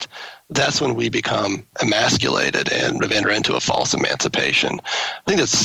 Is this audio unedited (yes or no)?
no